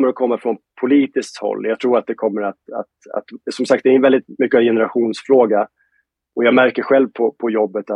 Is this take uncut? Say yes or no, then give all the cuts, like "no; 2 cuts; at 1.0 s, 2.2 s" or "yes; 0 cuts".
yes; 0 cuts